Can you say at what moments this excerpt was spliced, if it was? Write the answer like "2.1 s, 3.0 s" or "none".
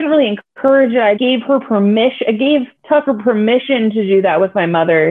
1.2 s, 2.8 s